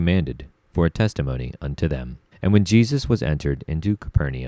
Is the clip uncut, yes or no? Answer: no